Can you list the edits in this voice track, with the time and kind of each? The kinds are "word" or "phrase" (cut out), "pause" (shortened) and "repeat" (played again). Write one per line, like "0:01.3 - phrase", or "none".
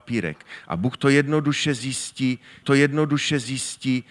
0:02.6 - repeat